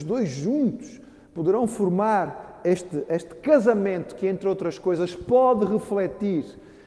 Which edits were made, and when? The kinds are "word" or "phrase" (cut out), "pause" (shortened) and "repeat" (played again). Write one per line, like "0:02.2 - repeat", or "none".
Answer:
none